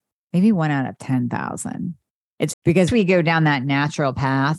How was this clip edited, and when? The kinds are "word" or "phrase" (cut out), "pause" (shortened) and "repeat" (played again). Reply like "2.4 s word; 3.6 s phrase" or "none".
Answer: 2.5 s phrase; 2.9 s word